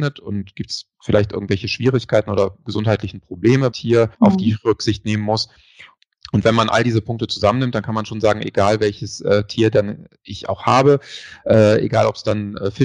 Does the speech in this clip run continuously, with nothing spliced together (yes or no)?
no